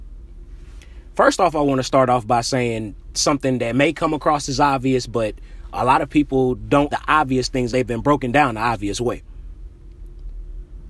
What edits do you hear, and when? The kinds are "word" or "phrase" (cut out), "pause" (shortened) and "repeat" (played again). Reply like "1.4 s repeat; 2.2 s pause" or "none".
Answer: 6.9 s word; 7.7 s word